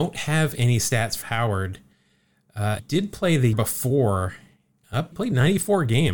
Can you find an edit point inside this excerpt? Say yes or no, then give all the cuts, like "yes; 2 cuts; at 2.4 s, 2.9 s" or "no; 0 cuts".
yes; 4 cuts; at 1.2 s, 2.8 s, 3.5 s, 5.1 s